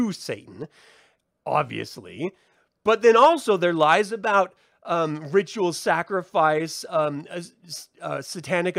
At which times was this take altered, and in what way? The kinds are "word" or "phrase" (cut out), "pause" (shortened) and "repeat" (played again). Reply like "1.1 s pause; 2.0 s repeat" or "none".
none